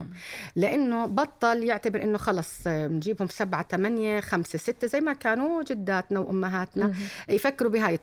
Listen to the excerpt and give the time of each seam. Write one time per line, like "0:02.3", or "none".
none